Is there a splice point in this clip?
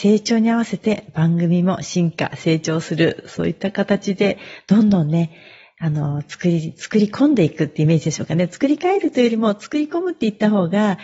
no; 0 cuts

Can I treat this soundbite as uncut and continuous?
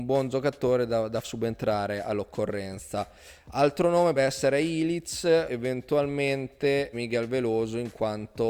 no; 4 cuts; at 1.2 s, 4.2 s, 5.5 s, 6.9 s

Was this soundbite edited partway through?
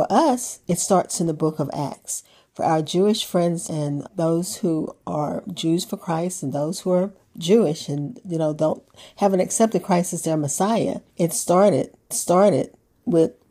yes; 4 cuts; at 3.7 s, 4.1 s, 11.1 s, 12.1 s

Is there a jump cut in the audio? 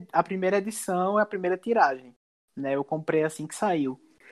no; 0 cuts

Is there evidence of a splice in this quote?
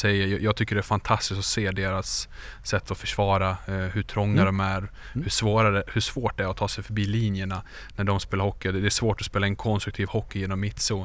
no; 0 cuts

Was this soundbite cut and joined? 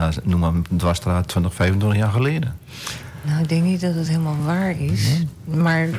no; 0 cuts

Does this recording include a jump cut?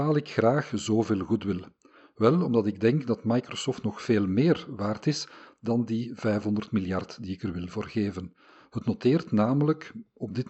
no; 0 cuts

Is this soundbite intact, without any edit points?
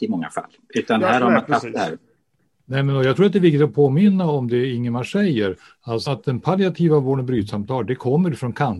no; 1 cut; at 6.0 s

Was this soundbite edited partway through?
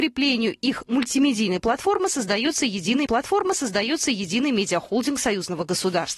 yes; 1 cut; at 3.1 s

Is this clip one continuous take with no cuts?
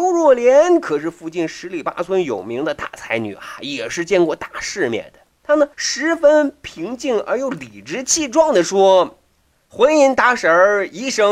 no; 2 cuts; at 5.4 s, 5.7 s

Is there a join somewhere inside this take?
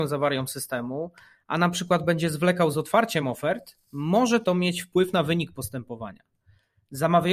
no; 0 cuts

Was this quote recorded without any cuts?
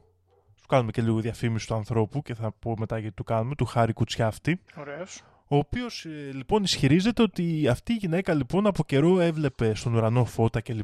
no; 1 cut; at 4.7 s

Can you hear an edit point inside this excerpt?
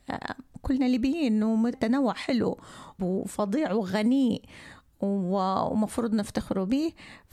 yes; 2 cuts; at 1.7 s, 3.0 s

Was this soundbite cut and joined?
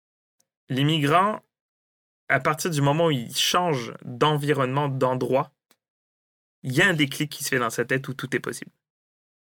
no; 0 cuts

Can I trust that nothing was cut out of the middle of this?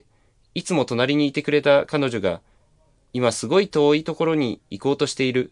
yes; 0 cuts

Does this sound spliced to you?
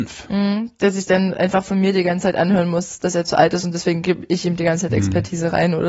no; 0 cuts

